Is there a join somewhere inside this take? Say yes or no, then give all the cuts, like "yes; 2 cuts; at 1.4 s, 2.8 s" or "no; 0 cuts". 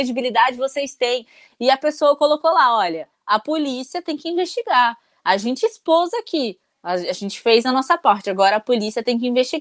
no; 0 cuts